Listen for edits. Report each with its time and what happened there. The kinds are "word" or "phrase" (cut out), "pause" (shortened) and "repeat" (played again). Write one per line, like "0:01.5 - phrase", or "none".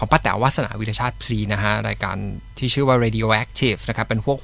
none